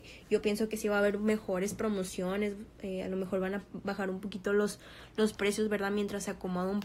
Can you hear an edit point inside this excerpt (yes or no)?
no